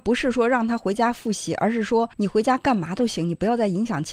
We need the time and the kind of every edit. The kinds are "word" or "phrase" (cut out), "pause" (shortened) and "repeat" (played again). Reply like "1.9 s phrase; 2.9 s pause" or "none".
2.1 s pause